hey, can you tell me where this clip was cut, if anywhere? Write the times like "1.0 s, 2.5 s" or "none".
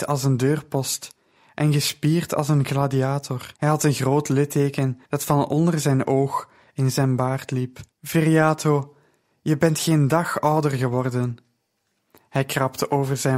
3.6 s, 5.1 s, 7.9 s